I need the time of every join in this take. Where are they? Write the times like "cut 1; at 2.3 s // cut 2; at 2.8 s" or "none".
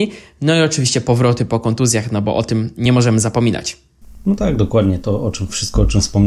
none